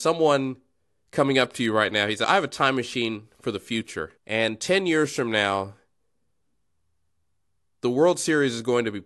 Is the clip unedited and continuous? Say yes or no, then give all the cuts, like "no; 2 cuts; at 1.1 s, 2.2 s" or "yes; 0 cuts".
no; 2 cuts; at 2.2 s, 4.2 s